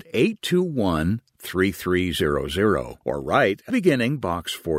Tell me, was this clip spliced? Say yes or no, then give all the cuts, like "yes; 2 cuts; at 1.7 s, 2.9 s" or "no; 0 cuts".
yes; 2 cuts; at 3.0 s, 3.7 s